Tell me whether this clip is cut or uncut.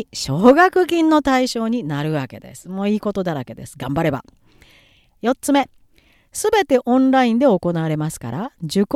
uncut